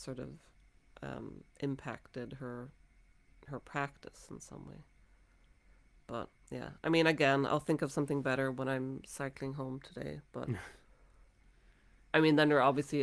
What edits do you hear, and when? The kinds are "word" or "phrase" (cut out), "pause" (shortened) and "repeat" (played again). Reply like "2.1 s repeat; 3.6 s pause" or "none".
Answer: 1.5 s pause